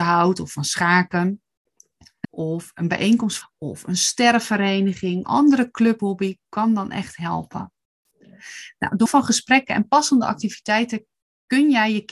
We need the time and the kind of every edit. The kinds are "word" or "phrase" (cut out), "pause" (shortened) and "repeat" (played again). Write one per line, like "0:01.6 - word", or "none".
0:02.2 - word
0:03.4 - phrase
0:05.2 - phrase
0:06.0 - word
0:09.1 - word